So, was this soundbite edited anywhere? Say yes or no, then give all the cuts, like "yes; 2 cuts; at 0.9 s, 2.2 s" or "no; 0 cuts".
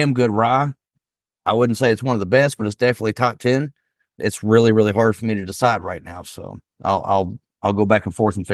no; 0 cuts